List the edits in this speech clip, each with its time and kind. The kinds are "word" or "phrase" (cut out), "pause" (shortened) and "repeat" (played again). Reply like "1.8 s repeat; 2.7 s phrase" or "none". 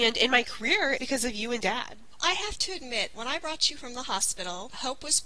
1.0 s word; 2.2 s word; 3.1 s word; 3.8 s word